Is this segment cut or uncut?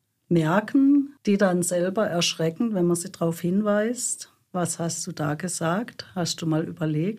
uncut